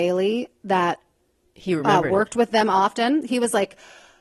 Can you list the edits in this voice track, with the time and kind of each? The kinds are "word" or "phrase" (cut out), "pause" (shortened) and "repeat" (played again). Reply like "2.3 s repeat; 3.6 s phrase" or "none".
none